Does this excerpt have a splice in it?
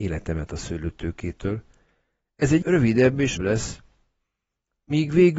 yes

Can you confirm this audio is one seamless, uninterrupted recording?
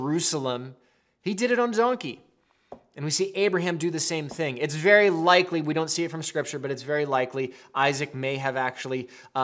yes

